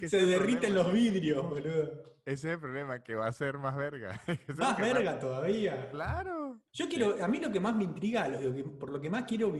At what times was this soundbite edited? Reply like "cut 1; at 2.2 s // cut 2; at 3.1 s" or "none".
cut 1; at 6.7 s